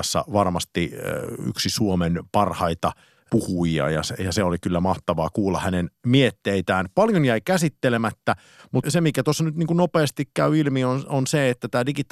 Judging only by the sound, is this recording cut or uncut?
cut